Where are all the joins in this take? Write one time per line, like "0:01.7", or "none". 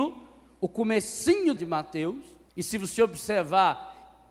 0:01.6
0:02.5